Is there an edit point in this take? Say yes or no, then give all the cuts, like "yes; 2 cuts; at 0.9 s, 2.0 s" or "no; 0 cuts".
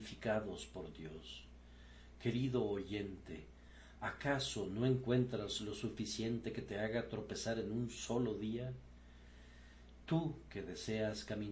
no; 0 cuts